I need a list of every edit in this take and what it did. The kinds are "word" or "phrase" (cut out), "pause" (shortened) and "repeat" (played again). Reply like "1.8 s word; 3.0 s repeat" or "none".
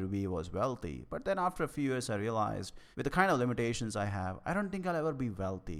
2.9 s pause